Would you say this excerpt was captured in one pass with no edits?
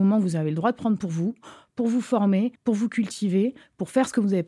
no; 1 cut; at 2.6 s

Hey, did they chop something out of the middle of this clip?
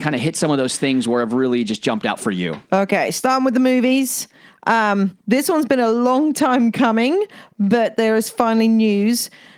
yes; 1 cut; at 5.2 s

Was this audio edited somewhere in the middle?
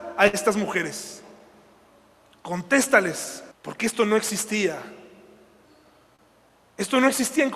yes; 1 cut; at 3.5 s

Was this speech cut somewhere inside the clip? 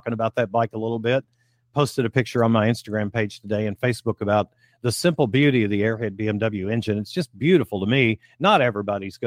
no; 0 cuts

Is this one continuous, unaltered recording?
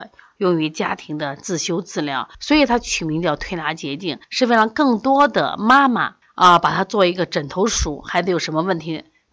no; 3 cuts; at 2.3 s, 4.2 s, 6.2 s

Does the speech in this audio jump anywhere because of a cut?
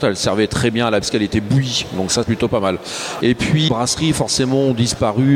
yes; 3 cuts; at 1.0 s, 2.2 s, 3.7 s

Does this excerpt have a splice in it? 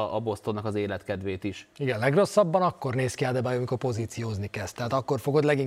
no; 0 cuts

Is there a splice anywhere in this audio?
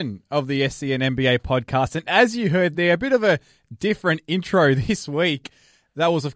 no; 0 cuts

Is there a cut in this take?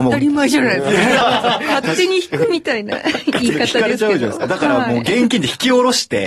no; 0 cuts

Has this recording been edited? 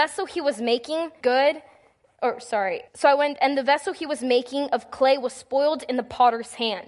yes; 2 cuts; at 1.2 s, 2.9 s

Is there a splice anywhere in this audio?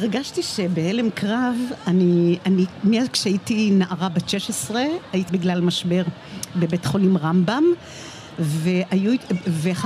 yes; 2 cuts; at 2.4 s, 5.3 s

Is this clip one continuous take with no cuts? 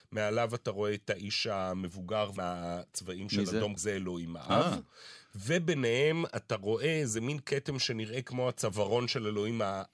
no; 2 cuts; at 2.4 s, 3.8 s

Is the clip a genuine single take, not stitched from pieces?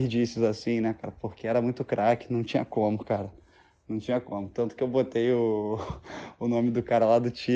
yes; 0 cuts

